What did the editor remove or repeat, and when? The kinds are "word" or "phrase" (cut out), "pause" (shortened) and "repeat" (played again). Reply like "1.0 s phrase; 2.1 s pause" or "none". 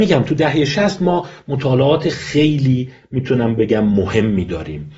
none